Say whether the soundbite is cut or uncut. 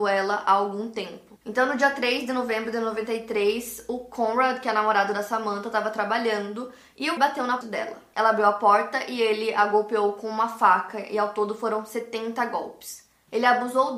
cut